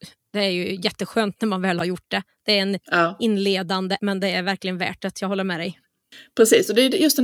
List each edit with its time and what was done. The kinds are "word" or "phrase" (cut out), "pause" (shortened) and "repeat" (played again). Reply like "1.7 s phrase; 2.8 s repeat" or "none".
4.0 s word